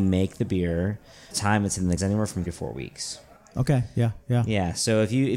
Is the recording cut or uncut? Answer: cut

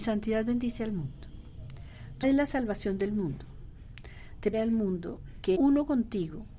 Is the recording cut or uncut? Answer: cut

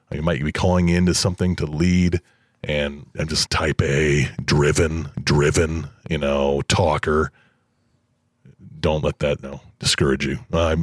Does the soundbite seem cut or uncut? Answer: cut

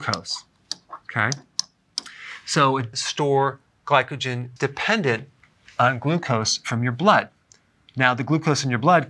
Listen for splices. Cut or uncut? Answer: cut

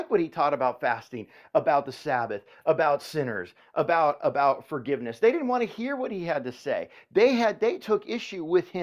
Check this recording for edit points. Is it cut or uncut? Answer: uncut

